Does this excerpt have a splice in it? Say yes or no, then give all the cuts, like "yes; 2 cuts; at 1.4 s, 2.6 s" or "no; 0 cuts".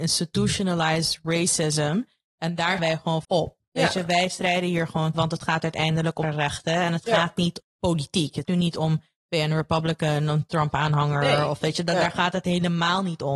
yes; 6 cuts; at 2.8 s, 3.2 s, 5.1 s, 6.2 s, 7.6 s, 8.4 s